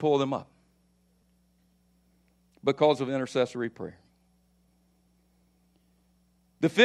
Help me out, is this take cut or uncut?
uncut